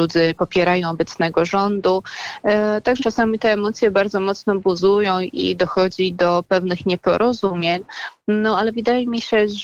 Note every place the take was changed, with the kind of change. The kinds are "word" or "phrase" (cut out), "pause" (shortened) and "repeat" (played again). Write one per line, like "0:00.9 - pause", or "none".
0:03.0 - word